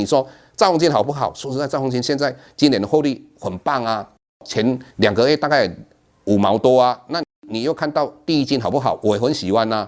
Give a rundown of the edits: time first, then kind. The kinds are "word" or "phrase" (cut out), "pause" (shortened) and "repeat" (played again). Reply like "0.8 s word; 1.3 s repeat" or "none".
4.9 s pause